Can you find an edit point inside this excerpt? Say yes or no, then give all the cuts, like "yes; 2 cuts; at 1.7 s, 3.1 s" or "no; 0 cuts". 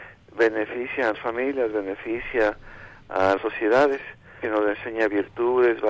yes; 3 cuts; at 1.1 s, 3.4 s, 4.4 s